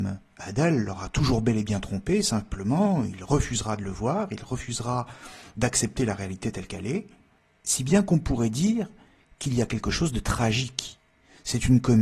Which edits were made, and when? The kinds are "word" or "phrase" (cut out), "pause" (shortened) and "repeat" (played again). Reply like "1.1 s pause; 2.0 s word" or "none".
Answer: none